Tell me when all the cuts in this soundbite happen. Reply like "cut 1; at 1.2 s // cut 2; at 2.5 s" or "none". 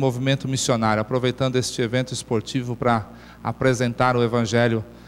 none